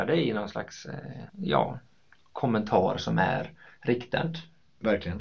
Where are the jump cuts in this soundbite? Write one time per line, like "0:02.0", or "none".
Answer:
0:01.3